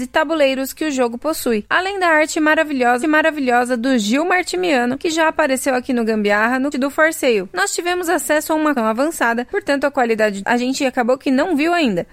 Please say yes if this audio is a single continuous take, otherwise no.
no